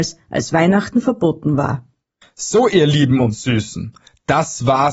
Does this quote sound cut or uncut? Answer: uncut